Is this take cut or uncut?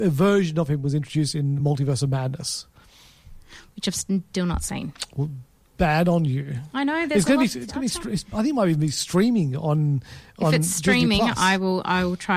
uncut